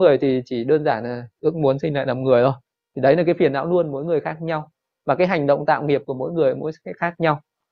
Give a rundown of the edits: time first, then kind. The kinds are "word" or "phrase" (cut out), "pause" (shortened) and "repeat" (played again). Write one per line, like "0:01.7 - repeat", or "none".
none